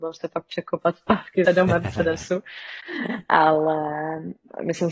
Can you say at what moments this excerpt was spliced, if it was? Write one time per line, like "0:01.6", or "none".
0:01.5